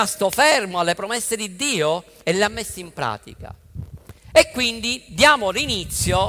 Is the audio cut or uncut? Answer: uncut